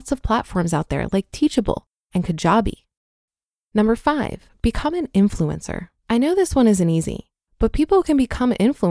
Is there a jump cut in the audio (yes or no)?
yes